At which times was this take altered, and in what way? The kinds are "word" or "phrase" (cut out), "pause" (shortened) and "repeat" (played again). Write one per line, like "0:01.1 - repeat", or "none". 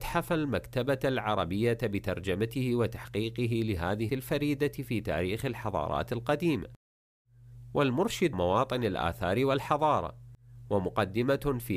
0:04.1 - word
0:08.3 - word